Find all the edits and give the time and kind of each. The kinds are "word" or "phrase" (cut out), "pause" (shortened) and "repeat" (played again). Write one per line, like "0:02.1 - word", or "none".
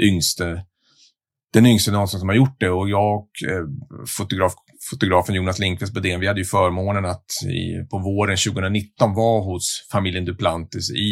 none